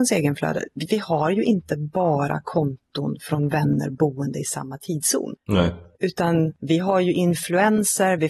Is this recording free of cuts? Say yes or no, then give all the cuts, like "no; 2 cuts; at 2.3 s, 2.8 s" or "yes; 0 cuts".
yes; 0 cuts